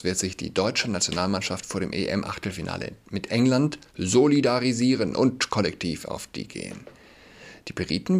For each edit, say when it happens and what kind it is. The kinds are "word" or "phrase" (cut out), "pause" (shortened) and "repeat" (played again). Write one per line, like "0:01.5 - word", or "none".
0:03.9 - pause
0:06.5 - word

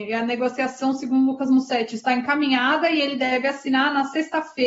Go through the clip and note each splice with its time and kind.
none

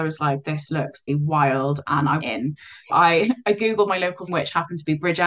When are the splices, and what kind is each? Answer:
0:01.1 - word
0:02.2 - word
0:02.9 - word
0:04.3 - word

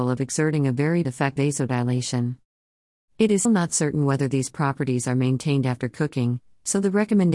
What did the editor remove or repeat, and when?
0:01.0 - word
0:01.4 - word
0:03.4 - word

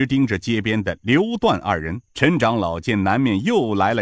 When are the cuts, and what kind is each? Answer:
0:02.1 - pause

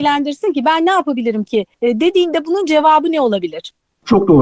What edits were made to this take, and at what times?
0:01.7 - pause

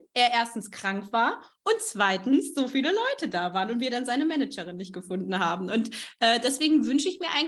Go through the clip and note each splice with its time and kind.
none

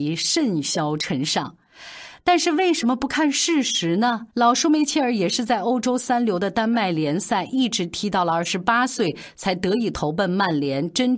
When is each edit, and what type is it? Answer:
0:04.3 - pause

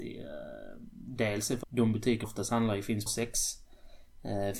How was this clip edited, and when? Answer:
0:01.6 - word
0:02.2 - word
0:03.1 - word

